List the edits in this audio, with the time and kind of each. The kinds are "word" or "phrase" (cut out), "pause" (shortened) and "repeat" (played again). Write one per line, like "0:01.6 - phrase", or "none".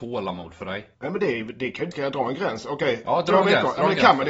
0:00.9 - pause
0:01.9 - phrase